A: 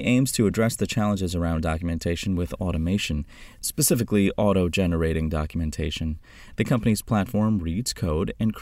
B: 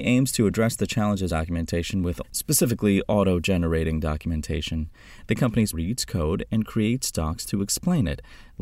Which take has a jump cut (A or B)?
B